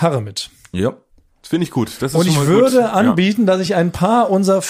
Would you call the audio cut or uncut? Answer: uncut